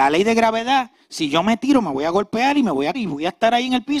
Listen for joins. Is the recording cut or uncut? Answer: cut